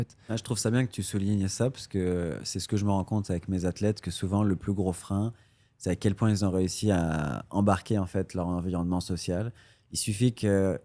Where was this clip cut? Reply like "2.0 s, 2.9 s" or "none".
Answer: none